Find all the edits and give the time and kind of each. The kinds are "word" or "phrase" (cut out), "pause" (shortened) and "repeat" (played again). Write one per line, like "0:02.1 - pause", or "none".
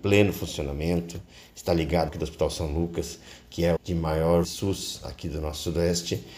0:02.1 - phrase
0:03.8 - word
0:04.4 - word